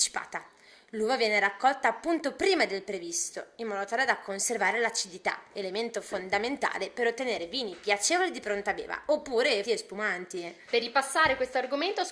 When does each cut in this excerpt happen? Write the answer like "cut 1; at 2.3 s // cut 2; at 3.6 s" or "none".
cut 1; at 9.6 s // cut 2; at 10.6 s